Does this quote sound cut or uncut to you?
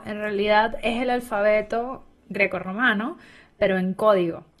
uncut